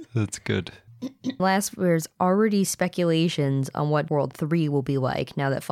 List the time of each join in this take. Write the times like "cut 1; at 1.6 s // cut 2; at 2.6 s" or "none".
cut 1; at 1.4 s // cut 2; at 4.1 s